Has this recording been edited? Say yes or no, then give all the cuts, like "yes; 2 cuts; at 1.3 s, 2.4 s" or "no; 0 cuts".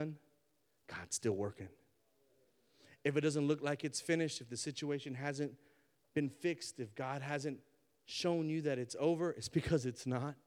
no; 0 cuts